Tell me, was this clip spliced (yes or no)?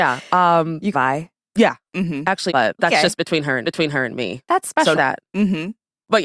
yes